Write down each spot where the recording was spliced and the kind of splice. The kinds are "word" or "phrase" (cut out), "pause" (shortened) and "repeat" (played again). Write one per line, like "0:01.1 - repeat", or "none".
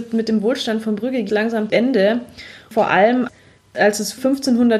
0:01.3 - word
0:01.7 - word